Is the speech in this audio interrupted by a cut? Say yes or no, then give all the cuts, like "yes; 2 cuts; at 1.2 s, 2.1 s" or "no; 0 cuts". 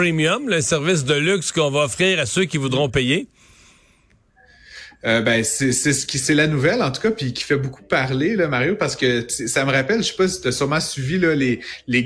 no; 0 cuts